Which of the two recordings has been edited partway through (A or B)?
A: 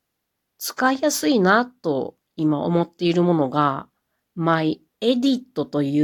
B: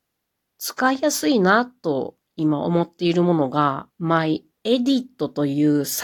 B